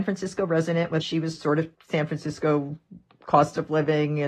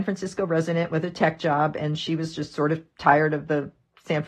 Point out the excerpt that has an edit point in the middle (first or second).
first